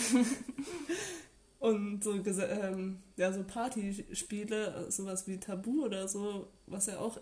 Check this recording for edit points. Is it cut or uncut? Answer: uncut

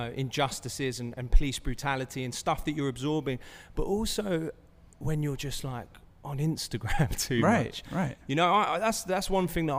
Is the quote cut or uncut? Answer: uncut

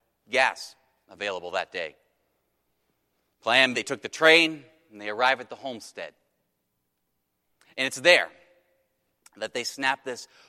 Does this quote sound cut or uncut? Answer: cut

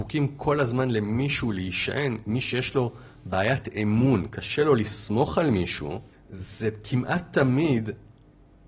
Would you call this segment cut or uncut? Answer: cut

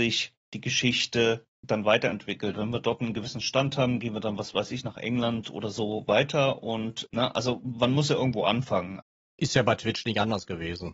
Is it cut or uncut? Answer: uncut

